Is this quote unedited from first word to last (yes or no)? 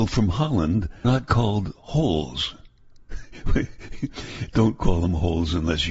no